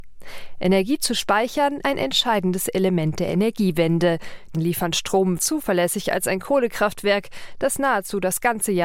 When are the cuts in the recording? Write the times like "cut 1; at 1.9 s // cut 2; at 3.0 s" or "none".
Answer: cut 1; at 1.8 s // cut 2; at 4.5 s // cut 3; at 5.4 s